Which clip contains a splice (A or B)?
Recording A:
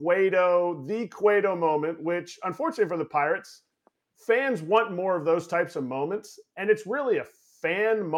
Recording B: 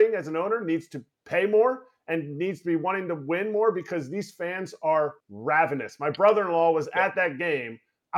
B